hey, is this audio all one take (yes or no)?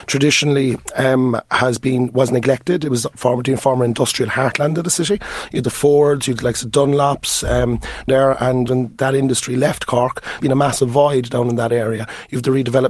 no